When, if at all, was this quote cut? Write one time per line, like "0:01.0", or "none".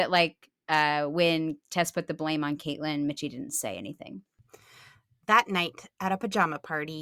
none